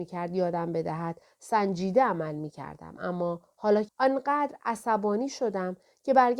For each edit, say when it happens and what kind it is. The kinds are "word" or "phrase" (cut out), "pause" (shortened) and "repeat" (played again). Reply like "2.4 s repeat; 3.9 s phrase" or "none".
3.9 s phrase